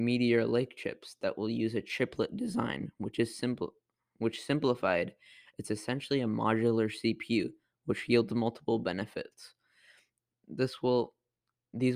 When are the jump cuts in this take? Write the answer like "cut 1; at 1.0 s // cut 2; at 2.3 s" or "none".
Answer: none

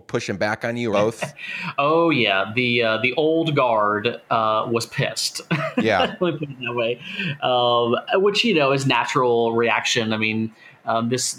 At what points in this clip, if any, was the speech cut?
cut 1; at 0.9 s

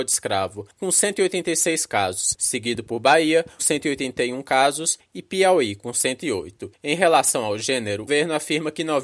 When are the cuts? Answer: cut 1; at 3.6 s // cut 2; at 8.1 s

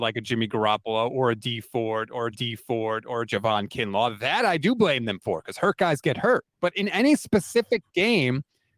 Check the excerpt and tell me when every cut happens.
cut 1; at 2.3 s // cut 2; at 6.5 s

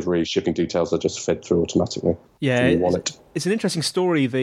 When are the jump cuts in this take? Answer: none

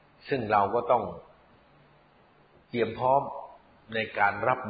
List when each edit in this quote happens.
none

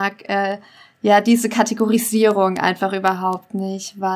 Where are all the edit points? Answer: none

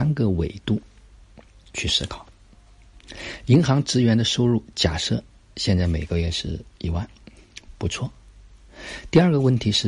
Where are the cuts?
none

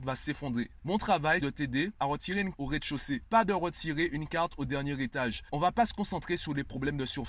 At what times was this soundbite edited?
cut 1; at 1.4 s // cut 2; at 2.5 s

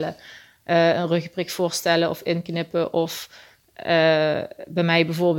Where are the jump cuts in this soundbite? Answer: none

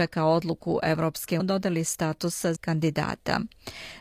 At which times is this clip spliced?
cut 1; at 1.4 s // cut 2; at 2.6 s

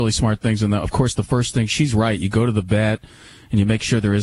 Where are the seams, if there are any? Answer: none

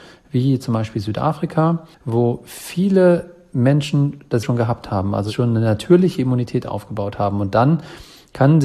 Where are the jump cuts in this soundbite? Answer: cut 1; at 1.9 s // cut 2; at 4.4 s

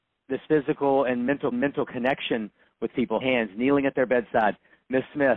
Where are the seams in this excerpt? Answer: cut 1; at 1.5 s // cut 2; at 3.2 s

